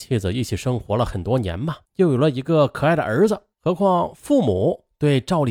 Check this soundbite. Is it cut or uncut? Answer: cut